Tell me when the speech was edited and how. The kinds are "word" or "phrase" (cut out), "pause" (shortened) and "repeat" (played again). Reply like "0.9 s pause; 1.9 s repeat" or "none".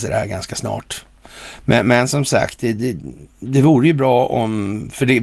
3.3 s pause